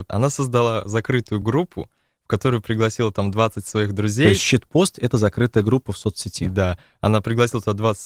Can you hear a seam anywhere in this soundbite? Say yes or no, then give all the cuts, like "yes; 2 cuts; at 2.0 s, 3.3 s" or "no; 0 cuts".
no; 0 cuts